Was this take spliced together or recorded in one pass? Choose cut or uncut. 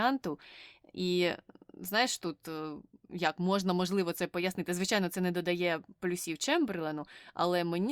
uncut